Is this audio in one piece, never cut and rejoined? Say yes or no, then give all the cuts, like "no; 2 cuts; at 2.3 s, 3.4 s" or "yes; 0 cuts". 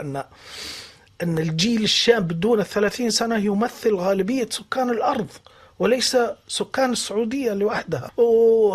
yes; 0 cuts